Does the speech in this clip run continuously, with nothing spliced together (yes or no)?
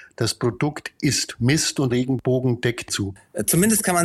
no